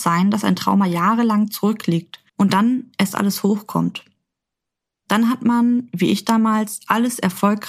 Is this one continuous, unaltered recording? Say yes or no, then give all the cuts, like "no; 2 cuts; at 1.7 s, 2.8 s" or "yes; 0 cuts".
no; 1 cut; at 2.3 s